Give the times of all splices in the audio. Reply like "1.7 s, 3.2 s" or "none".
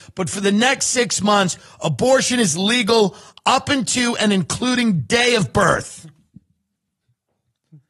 none